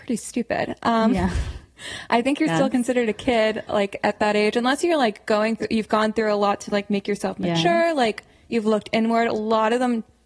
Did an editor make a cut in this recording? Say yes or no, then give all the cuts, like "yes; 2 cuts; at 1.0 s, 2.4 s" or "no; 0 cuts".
no; 0 cuts